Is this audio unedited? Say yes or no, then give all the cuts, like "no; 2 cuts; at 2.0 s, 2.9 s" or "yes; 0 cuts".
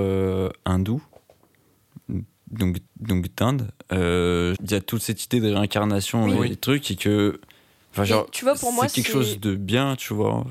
no; 2 cuts; at 2.9 s, 4.5 s